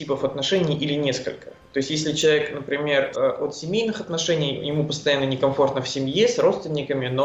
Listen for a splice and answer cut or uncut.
cut